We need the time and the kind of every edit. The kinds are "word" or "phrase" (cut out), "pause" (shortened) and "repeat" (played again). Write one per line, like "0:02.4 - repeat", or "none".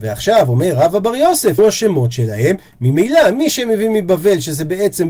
0:01.6 - word